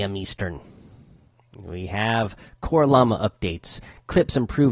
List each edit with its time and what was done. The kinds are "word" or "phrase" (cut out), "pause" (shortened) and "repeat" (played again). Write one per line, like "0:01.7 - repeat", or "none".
none

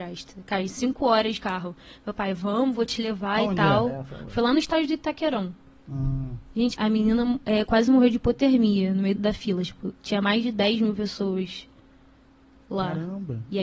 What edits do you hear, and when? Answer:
0:06.7 - word
0:09.2 - word

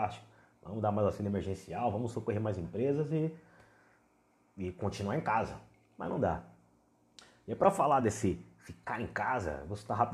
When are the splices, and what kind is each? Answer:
none

